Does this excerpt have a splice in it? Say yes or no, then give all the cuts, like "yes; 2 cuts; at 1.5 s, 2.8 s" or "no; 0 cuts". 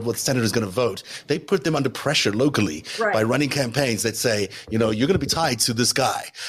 no; 0 cuts